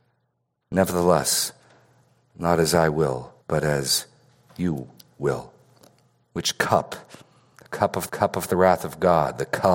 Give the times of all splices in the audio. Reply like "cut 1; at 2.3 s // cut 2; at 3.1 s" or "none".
cut 1; at 3.4 s // cut 2; at 8.1 s